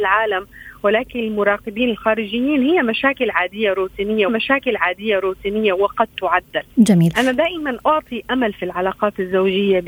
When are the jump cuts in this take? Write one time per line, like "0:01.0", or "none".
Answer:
0:04.3
0:06.7